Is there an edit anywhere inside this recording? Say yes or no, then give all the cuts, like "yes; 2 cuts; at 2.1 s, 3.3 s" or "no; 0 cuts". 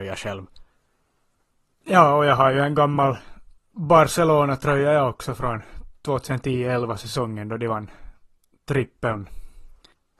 no; 0 cuts